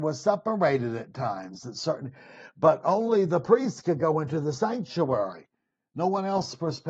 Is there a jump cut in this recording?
no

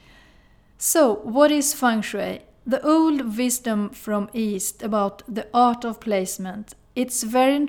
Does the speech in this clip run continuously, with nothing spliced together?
yes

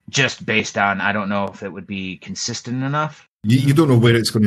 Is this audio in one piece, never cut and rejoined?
yes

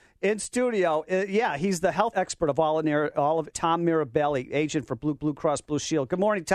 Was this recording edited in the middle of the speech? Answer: yes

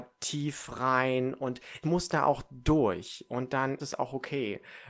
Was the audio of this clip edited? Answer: yes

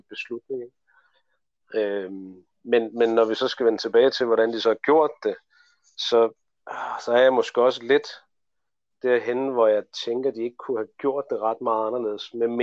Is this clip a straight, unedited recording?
yes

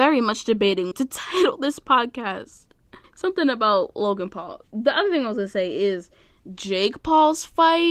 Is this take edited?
yes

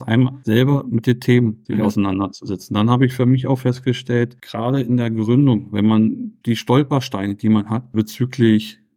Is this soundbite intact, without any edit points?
no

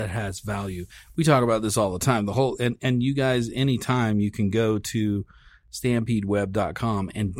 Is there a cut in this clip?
no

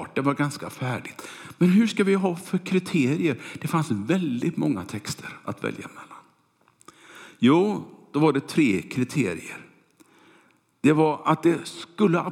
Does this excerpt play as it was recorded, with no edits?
yes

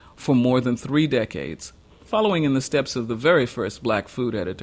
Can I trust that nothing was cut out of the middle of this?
yes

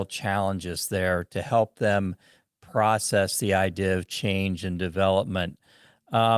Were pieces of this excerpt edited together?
no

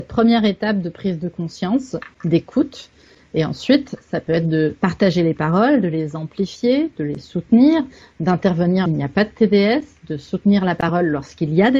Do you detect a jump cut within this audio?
yes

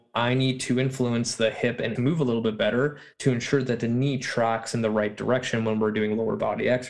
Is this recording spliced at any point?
yes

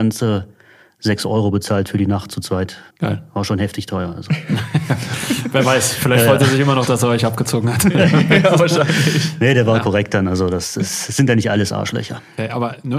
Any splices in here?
yes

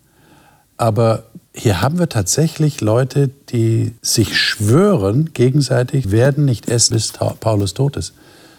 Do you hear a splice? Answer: yes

